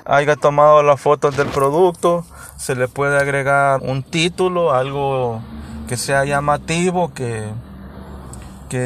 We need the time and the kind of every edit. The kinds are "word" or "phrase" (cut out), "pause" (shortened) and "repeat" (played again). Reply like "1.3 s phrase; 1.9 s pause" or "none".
3.8 s word